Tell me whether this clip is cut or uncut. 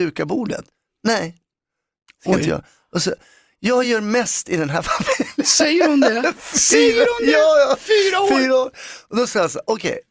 uncut